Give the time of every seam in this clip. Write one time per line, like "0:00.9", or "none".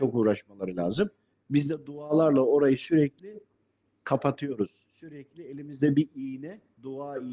none